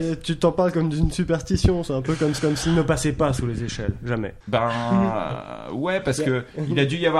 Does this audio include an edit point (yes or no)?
yes